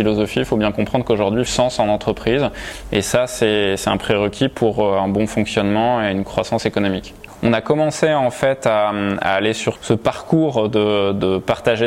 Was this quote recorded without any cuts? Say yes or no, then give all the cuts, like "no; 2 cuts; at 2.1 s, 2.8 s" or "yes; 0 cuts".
no; 2 cuts; at 1.5 s, 9.7 s